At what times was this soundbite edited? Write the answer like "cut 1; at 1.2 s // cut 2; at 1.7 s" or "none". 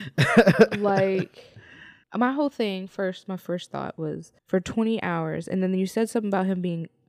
cut 1; at 2.0 s // cut 2; at 4.4 s